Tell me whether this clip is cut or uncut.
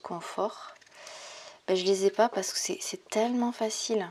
uncut